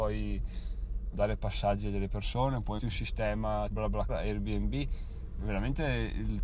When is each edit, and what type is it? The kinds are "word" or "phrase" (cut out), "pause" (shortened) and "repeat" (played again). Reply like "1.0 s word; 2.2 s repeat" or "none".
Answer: 1.1 s word; 2.8 s word; 3.7 s word; 4.1 s word